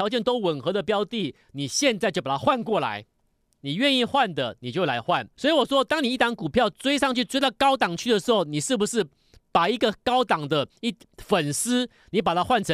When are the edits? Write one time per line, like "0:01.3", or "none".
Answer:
0:03.4
0:05.3